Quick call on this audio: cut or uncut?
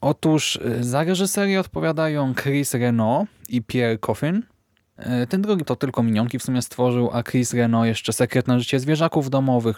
cut